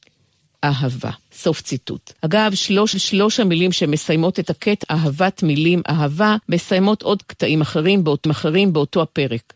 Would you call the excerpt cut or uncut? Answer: cut